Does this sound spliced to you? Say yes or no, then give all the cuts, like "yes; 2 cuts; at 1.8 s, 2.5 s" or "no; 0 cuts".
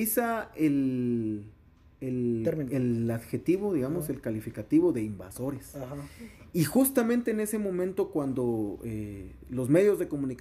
no; 0 cuts